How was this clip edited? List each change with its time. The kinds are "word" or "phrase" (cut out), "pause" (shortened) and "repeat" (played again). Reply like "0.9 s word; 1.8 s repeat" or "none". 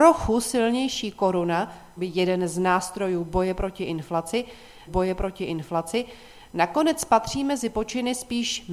2.0 s word; 4.9 s repeat